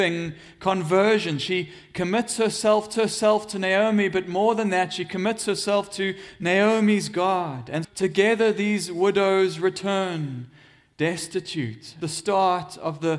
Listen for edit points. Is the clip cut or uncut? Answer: cut